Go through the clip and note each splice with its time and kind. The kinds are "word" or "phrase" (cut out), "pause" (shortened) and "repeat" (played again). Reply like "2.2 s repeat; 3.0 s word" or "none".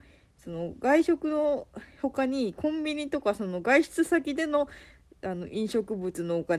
none